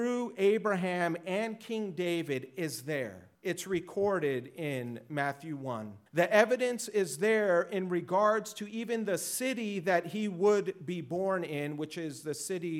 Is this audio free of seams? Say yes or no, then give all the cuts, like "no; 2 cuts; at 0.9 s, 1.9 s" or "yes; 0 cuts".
no; 2 cuts; at 3.3 s, 6.1 s